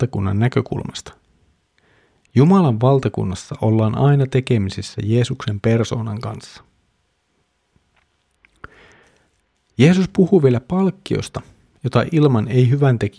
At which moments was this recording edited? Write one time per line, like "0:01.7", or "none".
none